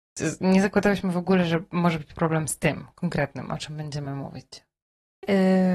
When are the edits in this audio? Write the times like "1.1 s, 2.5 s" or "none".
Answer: none